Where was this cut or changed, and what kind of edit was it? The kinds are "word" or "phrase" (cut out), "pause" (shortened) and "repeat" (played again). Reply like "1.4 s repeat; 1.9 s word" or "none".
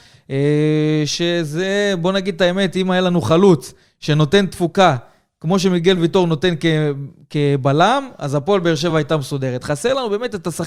none